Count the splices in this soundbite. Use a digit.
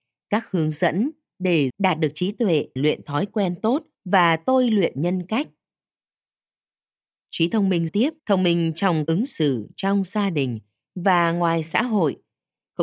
6